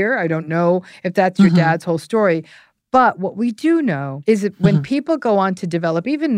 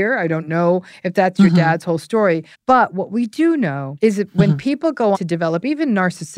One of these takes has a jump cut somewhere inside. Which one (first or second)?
second